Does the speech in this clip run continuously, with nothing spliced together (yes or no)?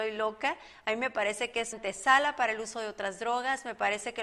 no